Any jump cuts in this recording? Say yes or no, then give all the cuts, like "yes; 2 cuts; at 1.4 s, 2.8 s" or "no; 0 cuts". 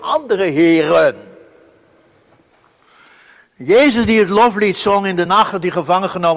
no; 0 cuts